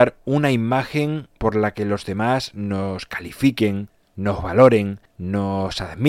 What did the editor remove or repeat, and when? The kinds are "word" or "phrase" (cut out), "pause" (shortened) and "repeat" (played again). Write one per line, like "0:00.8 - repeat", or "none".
0:01.4 - pause
0:05.1 - pause